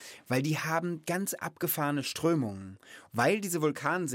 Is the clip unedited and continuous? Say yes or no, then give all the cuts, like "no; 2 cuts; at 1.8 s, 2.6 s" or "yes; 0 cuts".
yes; 0 cuts